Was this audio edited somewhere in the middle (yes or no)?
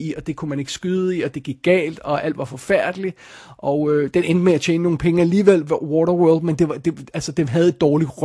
no